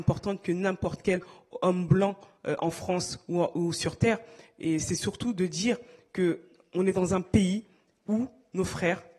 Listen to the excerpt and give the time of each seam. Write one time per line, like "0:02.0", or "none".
none